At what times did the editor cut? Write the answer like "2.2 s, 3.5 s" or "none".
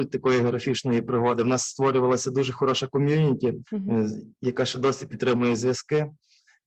3.7 s